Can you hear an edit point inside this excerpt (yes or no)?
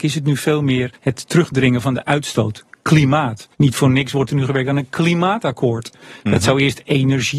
yes